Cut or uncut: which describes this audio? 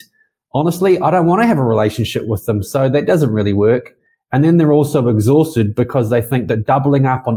uncut